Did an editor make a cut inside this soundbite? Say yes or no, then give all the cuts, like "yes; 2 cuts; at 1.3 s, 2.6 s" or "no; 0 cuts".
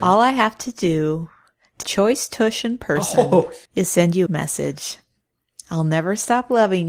yes; 3 cuts; at 1.8 s, 3.6 s, 4.3 s